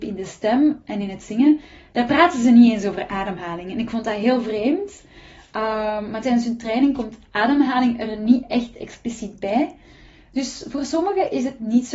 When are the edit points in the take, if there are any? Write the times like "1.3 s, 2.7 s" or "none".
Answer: none